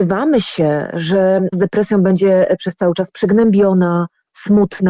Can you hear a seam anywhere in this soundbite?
yes; 1 cut; at 1.5 s

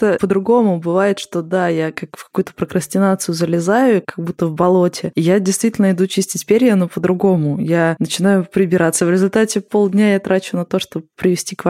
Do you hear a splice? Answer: no; 0 cuts

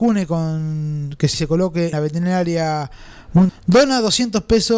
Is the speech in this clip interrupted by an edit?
yes; 3 cuts; at 1.3 s, 1.9 s, 3.5 s

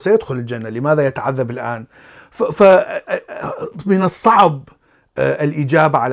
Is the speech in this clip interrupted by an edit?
no; 0 cuts

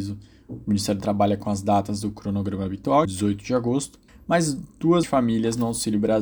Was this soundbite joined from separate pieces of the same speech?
yes; 4 cuts; at 1.0 s, 3.0 s, 4.1 s, 5.0 s

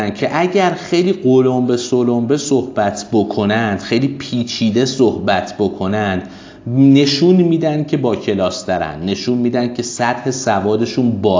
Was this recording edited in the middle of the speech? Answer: no; 0 cuts

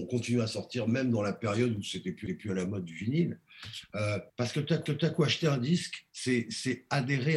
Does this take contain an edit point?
yes; 4 cuts; at 2.3 s, 4.3 s, 4.9 s, 6.1 s

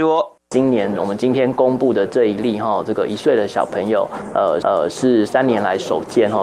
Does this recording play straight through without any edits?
no; 1 cut; at 4.6 s

